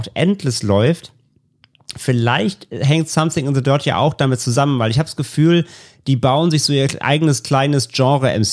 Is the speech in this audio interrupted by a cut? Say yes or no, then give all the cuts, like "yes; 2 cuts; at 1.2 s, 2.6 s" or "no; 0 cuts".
no; 0 cuts